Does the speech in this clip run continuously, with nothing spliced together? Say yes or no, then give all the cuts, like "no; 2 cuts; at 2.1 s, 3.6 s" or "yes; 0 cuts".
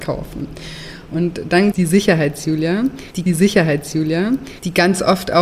no; 2 cuts; at 1.7 s, 3.3 s